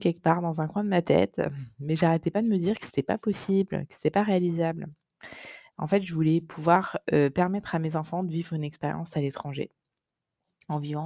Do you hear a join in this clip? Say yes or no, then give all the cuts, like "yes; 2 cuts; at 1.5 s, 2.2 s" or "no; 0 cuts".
no; 0 cuts